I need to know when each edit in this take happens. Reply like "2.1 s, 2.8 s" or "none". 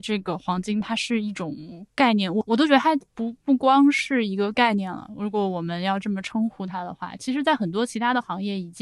3.1 s